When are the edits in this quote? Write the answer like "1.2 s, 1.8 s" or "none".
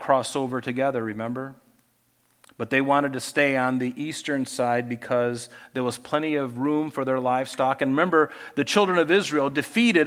none